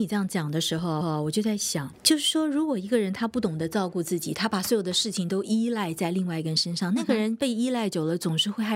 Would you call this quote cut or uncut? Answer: cut